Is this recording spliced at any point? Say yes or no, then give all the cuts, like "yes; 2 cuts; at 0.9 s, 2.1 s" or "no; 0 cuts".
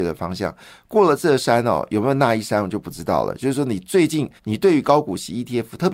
yes; 1 cut; at 4.4 s